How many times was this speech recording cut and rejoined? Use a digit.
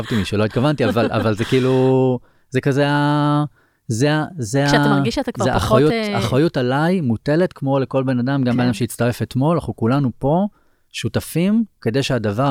0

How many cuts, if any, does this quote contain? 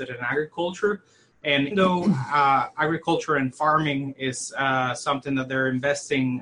1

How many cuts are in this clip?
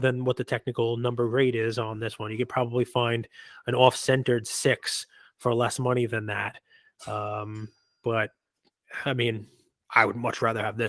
0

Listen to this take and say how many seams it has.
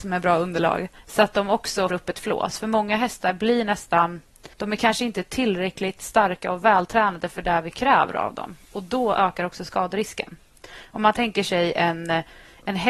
3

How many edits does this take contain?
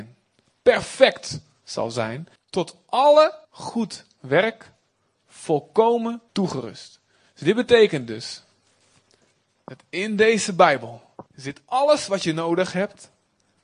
4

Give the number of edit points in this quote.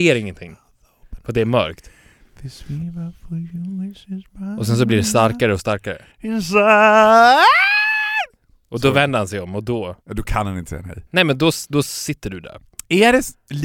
3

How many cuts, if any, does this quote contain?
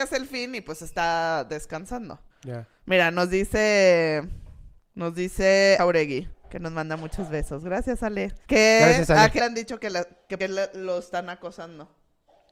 7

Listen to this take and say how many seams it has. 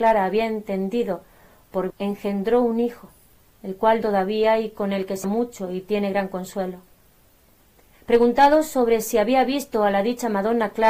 3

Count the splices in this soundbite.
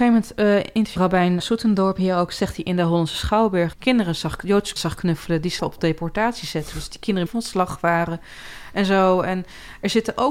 7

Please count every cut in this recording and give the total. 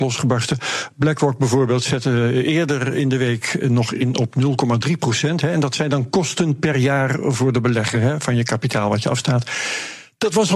0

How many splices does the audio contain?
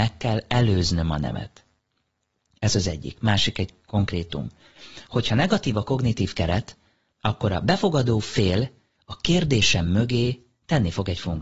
0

